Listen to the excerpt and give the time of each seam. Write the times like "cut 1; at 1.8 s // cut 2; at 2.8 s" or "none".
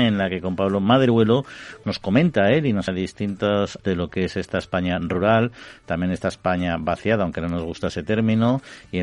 cut 1; at 1.8 s // cut 2; at 2.9 s // cut 3; at 3.8 s